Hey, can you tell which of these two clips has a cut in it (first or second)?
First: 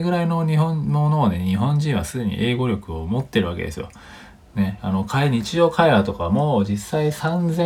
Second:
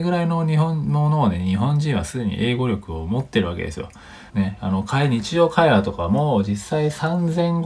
second